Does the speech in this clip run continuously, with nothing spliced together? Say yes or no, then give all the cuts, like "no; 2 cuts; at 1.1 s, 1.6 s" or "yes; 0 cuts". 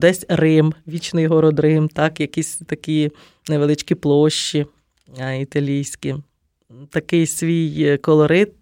yes; 0 cuts